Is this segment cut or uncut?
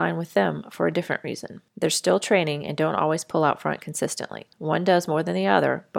cut